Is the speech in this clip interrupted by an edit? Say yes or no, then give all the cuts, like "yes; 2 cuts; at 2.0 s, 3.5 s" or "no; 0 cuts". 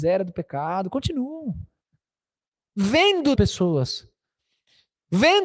yes; 1 cut; at 3.4 s